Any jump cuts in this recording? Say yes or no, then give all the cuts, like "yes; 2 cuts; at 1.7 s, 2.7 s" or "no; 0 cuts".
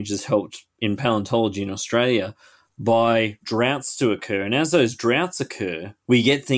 yes; 1 cut; at 3.4 s